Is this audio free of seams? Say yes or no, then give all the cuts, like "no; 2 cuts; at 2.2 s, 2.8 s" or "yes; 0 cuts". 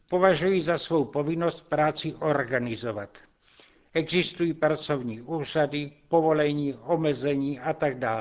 yes; 0 cuts